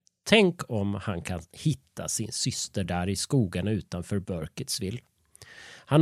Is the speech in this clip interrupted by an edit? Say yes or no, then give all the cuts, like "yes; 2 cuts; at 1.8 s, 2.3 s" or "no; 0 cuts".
no; 0 cuts